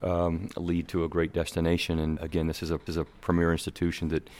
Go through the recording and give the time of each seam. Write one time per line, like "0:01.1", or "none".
0:02.2
0:02.9